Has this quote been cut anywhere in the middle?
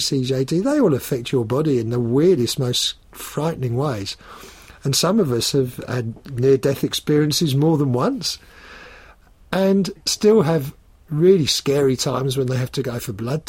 no; 0 cuts

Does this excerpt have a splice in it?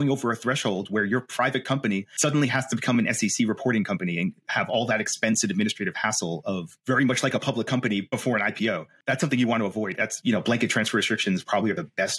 no; 0 cuts

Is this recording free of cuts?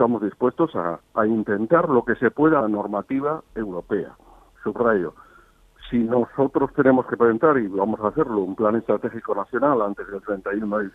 no; 1 cut; at 2.6 s

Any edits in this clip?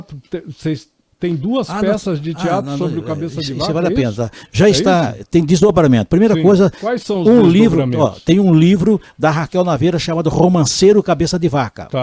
no; 0 cuts

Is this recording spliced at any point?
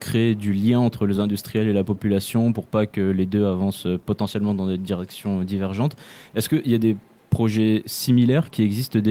no; 0 cuts

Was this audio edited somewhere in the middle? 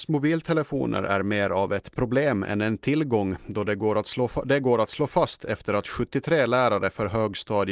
no; 0 cuts

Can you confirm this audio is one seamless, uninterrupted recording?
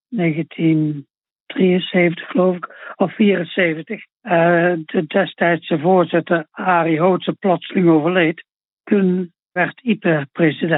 no; 2 cuts; at 4.1 s, 8.6 s

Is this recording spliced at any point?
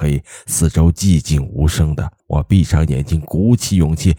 yes; 1 cut; at 2.2 s

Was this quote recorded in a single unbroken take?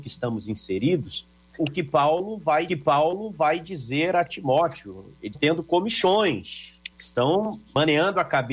no; 4 cuts; at 1.6 s, 2.7 s, 5.3 s, 6.9 s

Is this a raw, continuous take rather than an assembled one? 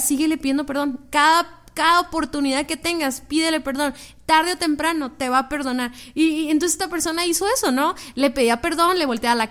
yes; 0 cuts

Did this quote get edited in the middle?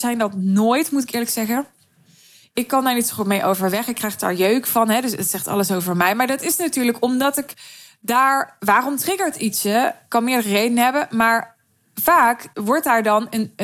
no; 0 cuts

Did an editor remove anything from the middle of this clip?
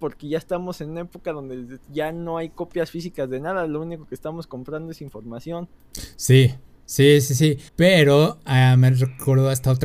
yes; 1 cut; at 7.7 s

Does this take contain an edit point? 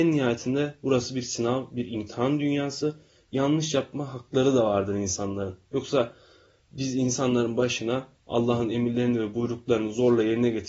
no; 0 cuts

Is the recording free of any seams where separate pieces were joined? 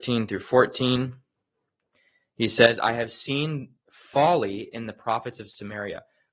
yes; 0 cuts

